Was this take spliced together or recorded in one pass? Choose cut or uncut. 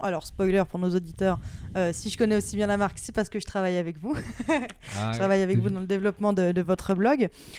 uncut